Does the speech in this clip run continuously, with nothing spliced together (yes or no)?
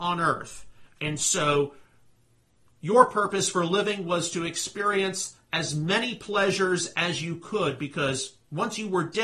yes